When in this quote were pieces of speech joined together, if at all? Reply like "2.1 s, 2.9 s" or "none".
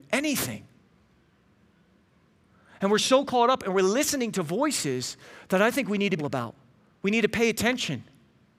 6.2 s, 6.9 s